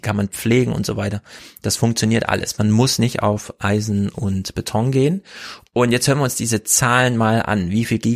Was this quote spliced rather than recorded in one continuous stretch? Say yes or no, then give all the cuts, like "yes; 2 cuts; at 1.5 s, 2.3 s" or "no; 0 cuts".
no; 0 cuts